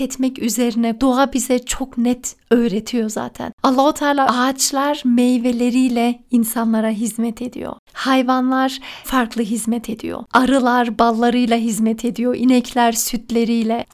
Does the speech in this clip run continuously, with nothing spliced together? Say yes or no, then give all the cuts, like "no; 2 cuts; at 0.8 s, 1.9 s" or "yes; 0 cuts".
no; 3 cuts; at 1.0 s, 4.3 s, 9.0 s